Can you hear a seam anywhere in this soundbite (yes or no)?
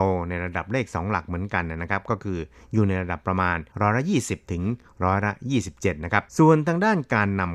yes